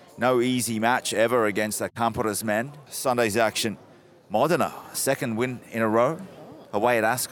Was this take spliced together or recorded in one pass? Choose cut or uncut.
uncut